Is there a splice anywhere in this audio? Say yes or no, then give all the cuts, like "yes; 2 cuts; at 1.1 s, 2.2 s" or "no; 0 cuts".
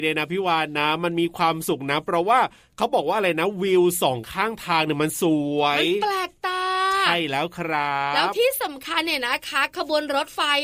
no; 0 cuts